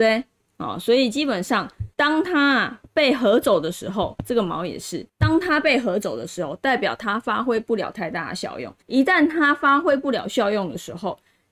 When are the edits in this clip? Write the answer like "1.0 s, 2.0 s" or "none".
1.9 s, 5.1 s, 8.8 s